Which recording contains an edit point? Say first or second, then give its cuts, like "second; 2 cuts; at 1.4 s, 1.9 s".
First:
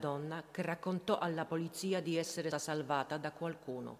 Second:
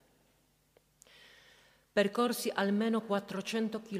first; 1 cut; at 2.5 s